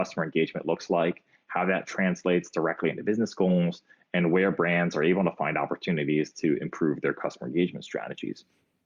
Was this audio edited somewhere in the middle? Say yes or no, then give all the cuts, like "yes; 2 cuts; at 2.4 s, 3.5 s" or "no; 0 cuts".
no; 0 cuts